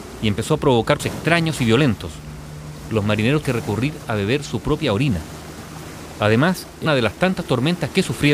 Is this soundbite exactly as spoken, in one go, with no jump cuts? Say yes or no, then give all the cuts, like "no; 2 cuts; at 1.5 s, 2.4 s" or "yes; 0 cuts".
no; 3 cuts; at 1.0 s, 3.4 s, 6.9 s